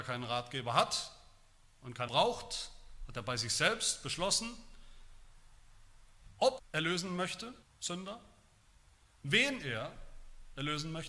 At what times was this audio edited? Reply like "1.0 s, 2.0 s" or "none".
2.1 s, 6.6 s, 7.6 s